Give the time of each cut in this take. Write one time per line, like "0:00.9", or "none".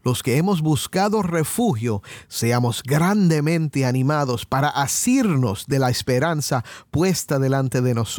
none